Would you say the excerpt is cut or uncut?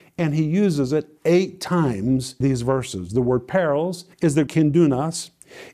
cut